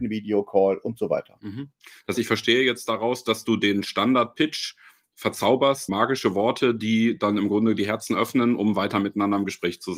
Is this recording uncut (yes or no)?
no